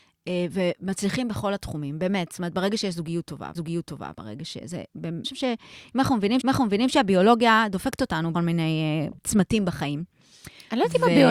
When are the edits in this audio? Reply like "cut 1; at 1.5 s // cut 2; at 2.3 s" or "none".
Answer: cut 1; at 3.5 s // cut 2; at 5.2 s // cut 3; at 6.4 s // cut 4; at 8.3 s // cut 5; at 9.2 s